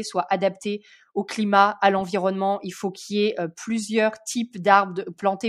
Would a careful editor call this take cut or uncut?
uncut